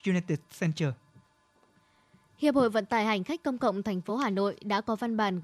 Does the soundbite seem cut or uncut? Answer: uncut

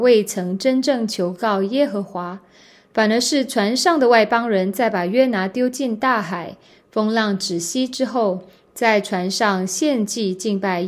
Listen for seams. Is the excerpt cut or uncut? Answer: uncut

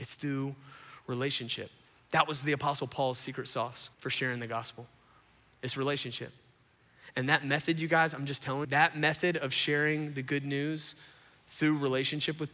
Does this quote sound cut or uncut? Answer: cut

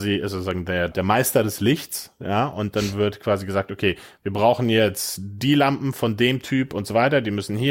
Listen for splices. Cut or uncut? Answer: cut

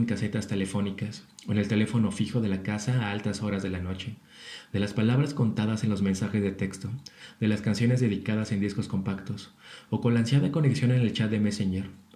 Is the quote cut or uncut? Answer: uncut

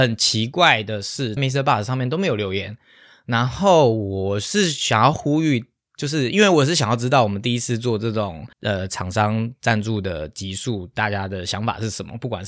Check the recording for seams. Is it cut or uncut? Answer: cut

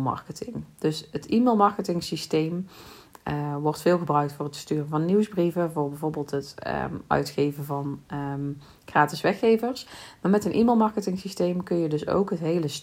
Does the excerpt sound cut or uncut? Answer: uncut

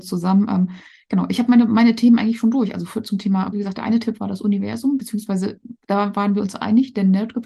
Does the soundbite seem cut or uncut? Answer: cut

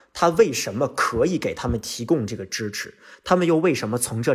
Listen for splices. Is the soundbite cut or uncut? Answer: uncut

